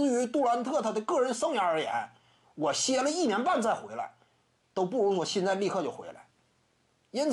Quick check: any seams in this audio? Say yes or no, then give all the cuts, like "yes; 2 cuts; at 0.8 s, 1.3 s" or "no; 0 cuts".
no; 0 cuts